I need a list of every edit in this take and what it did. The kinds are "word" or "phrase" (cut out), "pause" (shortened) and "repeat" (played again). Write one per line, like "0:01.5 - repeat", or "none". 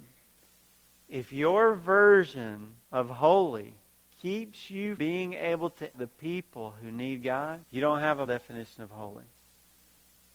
0:02.8 - pause
0:03.9 - pause
0:05.0 - word
0:05.9 - word
0:07.6 - pause
0:08.3 - word